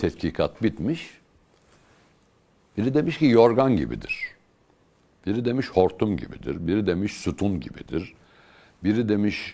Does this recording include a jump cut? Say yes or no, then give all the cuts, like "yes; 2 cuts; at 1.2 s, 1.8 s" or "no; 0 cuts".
no; 0 cuts